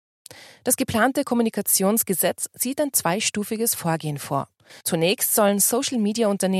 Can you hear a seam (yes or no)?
yes